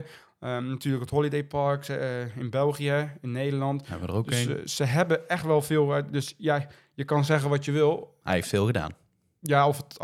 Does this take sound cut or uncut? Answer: uncut